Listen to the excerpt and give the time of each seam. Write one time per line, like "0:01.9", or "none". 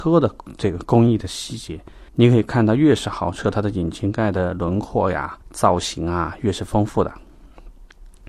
0:02.1
0:05.4